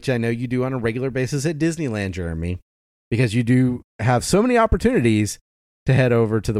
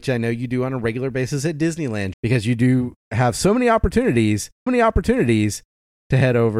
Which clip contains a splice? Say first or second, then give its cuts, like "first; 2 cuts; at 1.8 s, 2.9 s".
second; 2 cuts; at 2.1 s, 4.7 s